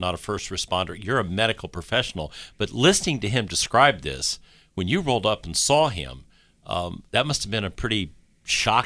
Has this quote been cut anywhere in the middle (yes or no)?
no